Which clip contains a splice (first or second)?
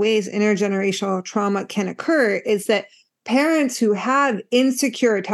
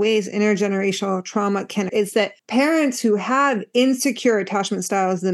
second